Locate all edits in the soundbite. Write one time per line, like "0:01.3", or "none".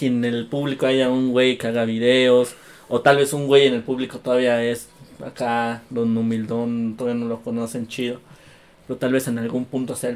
none